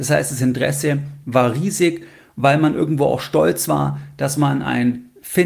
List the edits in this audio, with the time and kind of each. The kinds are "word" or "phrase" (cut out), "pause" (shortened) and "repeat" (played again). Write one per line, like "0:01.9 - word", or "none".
none

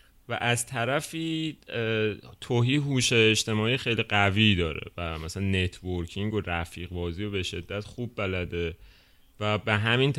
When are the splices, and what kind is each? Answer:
none

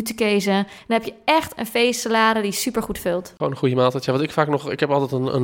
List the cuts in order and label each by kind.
none

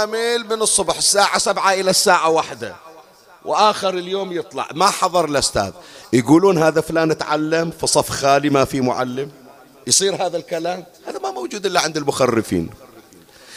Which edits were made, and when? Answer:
0:10.9 - pause

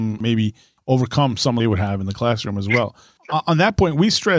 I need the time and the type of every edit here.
0:01.6 - phrase

